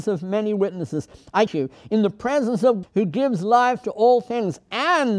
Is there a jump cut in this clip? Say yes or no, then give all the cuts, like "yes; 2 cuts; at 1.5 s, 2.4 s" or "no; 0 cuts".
yes; 2 cuts; at 1.5 s, 2.8 s